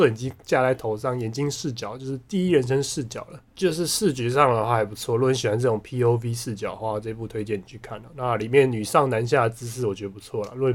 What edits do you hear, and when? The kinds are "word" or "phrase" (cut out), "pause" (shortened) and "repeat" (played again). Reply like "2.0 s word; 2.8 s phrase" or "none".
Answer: 3.5 s pause